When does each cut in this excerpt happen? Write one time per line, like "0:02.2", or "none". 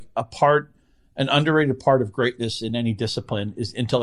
none